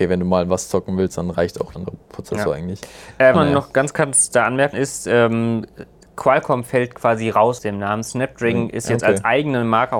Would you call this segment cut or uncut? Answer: cut